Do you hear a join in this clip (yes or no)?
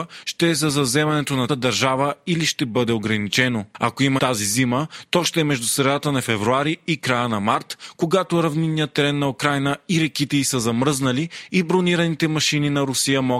yes